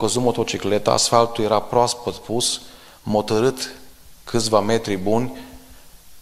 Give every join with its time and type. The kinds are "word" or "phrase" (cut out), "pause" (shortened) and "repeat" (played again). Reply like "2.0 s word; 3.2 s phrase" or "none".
none